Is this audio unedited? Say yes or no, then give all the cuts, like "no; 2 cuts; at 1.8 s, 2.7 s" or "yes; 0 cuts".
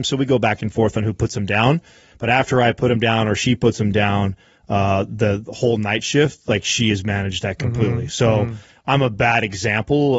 yes; 0 cuts